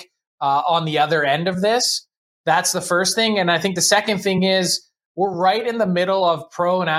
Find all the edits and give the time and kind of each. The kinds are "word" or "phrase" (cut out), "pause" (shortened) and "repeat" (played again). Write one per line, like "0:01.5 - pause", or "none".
none